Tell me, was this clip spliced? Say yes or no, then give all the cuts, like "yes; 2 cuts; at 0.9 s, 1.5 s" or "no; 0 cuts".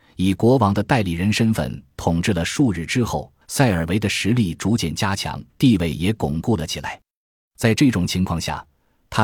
yes; 2 cuts; at 3.4 s, 5.5 s